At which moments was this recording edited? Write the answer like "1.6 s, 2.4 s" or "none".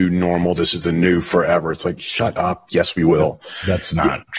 none